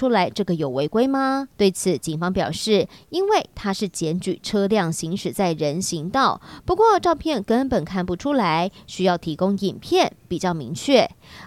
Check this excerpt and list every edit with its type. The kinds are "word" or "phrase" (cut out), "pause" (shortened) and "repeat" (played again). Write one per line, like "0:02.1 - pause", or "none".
0:01.5 - pause

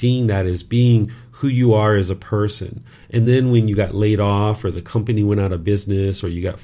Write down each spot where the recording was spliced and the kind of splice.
none

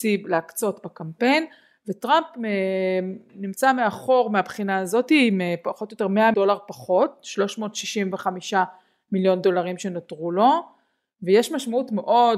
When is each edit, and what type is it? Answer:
0:06.3 - word

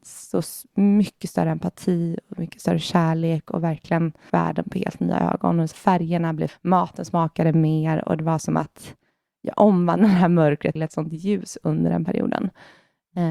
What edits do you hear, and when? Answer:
0:04.3 - word
0:05.7 - word
0:06.5 - word
0:10.8 - word

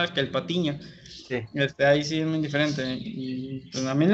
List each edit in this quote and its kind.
none

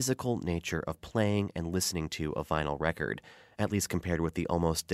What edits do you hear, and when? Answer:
none

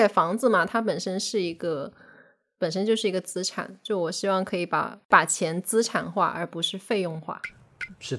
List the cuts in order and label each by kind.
none

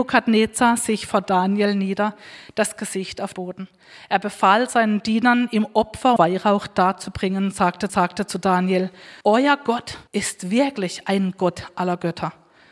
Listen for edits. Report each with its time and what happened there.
0:03.3 - word
0:06.2 - word
0:07.9 - repeat
0:09.2 - pause
0:10.1 - pause

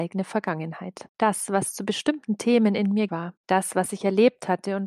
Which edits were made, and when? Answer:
0:03.1 - word

